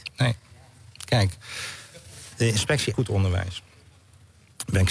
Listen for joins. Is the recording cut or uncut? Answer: cut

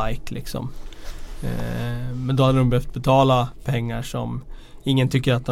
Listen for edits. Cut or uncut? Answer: uncut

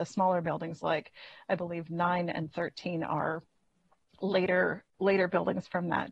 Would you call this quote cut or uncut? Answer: uncut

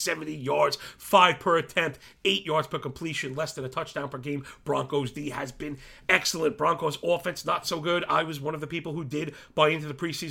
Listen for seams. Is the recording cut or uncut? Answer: uncut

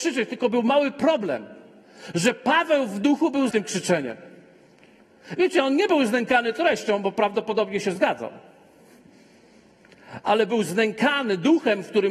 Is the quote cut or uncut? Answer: cut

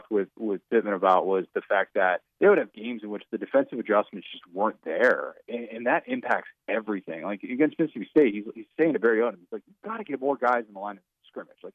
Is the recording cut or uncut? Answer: cut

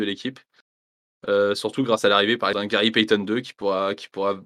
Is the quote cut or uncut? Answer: cut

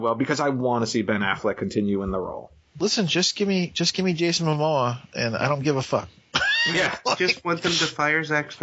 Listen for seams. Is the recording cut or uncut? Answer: uncut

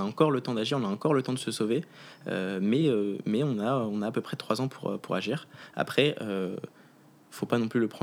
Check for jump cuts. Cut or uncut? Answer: uncut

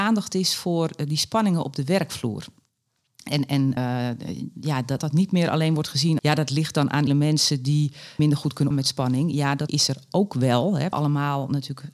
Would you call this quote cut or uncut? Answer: cut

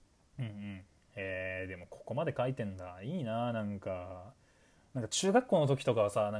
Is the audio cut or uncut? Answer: uncut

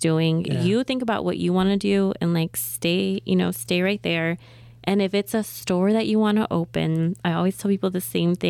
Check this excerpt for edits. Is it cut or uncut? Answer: uncut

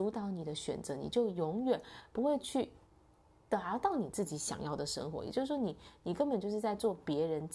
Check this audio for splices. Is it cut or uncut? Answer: uncut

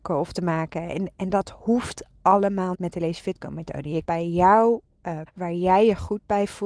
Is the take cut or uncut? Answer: cut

